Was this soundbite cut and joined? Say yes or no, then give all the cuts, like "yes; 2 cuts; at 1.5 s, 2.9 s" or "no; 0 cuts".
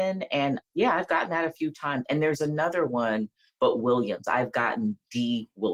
no; 0 cuts